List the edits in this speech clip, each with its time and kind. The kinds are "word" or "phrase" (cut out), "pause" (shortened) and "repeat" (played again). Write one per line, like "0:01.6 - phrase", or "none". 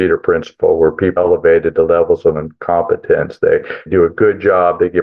0:01.2 - word
0:03.9 - word